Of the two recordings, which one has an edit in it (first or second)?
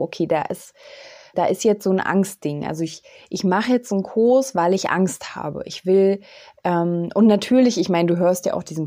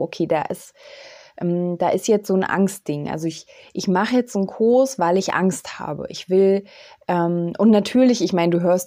first